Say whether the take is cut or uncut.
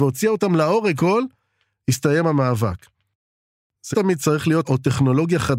cut